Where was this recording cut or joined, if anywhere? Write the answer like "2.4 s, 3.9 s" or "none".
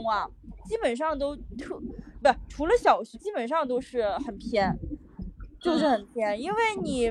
3.1 s